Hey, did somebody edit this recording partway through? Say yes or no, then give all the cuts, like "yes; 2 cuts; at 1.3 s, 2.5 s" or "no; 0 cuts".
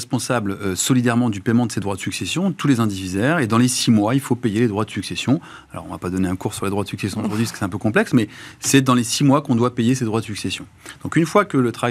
no; 0 cuts